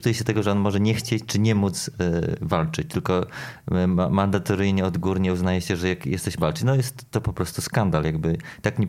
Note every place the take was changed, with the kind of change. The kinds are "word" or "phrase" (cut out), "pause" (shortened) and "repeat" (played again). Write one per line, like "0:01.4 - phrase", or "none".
0:06.4 - phrase